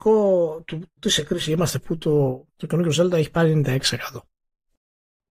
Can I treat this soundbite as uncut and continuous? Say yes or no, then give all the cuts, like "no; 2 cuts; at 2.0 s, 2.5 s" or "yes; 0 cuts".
no; 3 cuts; at 1.0 s, 1.8 s, 2.5 s